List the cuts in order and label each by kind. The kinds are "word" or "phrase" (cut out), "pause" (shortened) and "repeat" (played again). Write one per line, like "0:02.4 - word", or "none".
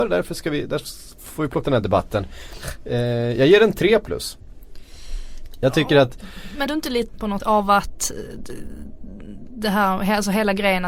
0:01.6 - word
0:06.7 - word
0:07.1 - word
0:07.4 - word